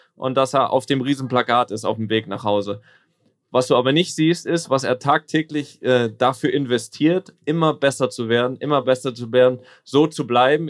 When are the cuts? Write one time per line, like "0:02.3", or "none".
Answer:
none